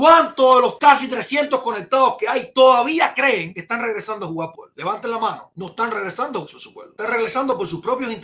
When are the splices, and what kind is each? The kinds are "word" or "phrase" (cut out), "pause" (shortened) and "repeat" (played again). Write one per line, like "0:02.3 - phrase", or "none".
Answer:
0:04.5 - word
0:06.5 - word